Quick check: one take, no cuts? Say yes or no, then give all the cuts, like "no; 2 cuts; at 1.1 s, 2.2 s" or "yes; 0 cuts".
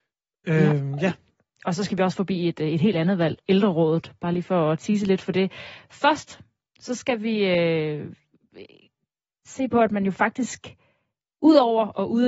yes; 0 cuts